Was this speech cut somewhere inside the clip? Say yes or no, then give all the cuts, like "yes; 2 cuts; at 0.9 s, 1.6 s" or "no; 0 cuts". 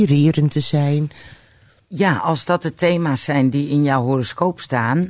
no; 0 cuts